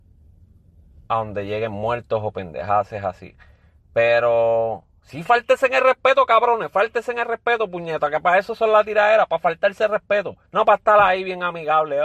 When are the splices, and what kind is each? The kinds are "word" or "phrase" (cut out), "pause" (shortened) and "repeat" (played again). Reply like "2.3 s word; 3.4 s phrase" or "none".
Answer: 10.5 s pause